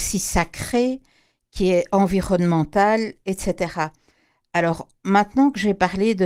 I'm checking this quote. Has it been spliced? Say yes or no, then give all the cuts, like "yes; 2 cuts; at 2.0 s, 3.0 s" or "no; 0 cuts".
no; 0 cuts